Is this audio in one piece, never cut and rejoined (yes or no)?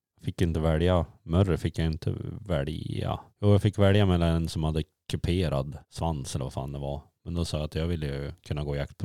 no